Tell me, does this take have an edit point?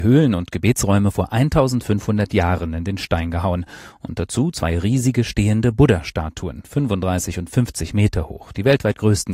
no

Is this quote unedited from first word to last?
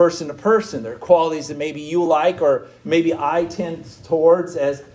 yes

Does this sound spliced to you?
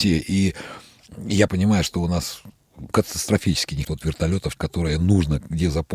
yes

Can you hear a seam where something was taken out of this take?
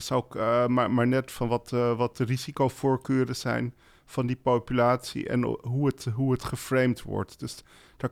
no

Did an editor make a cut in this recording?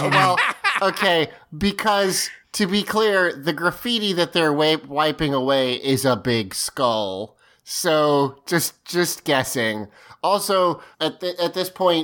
yes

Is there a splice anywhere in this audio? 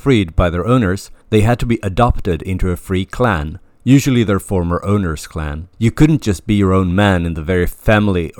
yes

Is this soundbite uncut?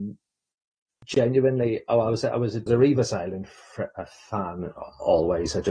no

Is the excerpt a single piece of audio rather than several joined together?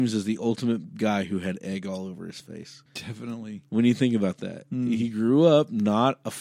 no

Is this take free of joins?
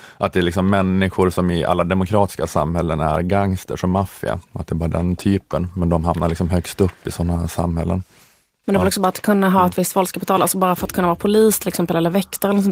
yes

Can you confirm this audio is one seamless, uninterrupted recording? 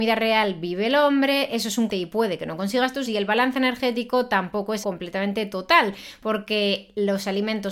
no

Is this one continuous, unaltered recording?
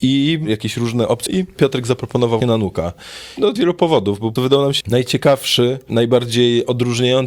no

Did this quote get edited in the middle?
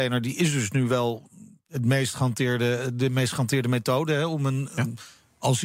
no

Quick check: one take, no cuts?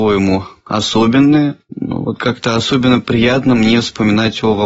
yes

